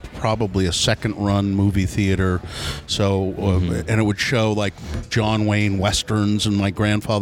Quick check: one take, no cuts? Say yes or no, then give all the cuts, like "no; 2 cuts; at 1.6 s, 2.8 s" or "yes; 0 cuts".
yes; 0 cuts